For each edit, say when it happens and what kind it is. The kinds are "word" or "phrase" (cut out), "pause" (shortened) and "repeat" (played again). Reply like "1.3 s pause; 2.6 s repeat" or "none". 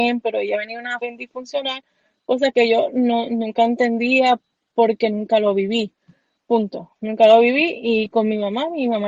1.0 s word